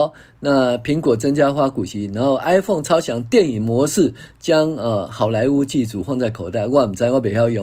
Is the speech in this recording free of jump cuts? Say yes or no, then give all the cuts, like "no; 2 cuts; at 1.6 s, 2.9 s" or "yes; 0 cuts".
yes; 0 cuts